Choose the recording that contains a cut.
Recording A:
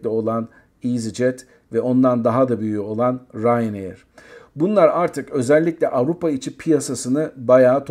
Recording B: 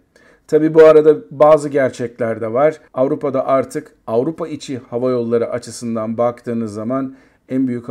B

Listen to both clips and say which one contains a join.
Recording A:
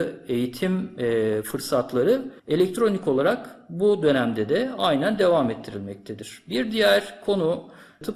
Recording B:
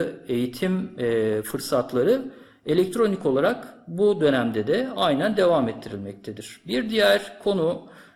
A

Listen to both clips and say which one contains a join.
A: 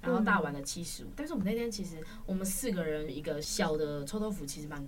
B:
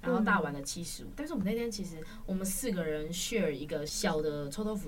A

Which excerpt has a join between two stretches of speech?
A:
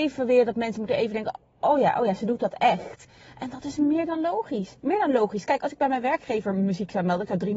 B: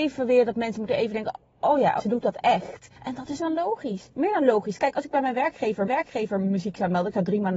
B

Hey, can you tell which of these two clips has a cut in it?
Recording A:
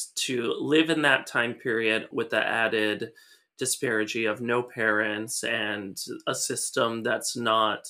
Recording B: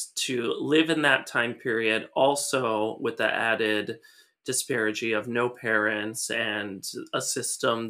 A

